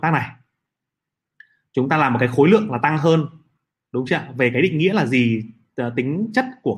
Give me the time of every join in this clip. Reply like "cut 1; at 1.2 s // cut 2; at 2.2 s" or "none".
none